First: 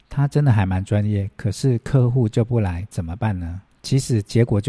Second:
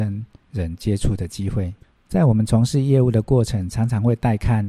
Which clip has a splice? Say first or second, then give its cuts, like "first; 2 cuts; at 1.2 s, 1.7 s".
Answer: first; 1 cut; at 3.7 s